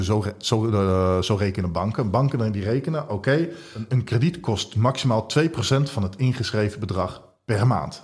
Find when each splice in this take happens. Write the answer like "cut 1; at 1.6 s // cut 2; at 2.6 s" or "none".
none

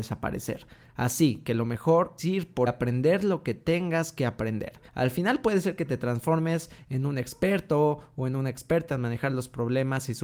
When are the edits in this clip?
cut 1; at 2.2 s // cut 2; at 2.7 s // cut 3; at 4.9 s

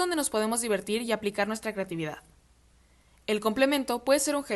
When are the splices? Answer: none

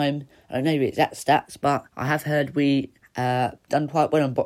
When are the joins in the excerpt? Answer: cut 1; at 1.9 s // cut 2; at 3.0 s

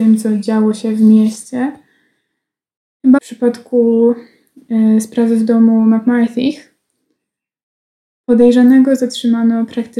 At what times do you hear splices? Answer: cut 1; at 3.2 s

